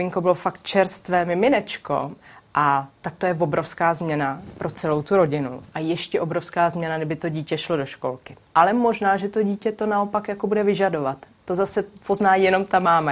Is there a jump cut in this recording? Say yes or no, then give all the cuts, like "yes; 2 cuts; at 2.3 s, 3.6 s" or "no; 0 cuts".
no; 0 cuts